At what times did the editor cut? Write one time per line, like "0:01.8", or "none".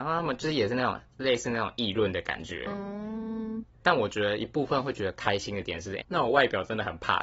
0:01.1
0:03.8
0:06.0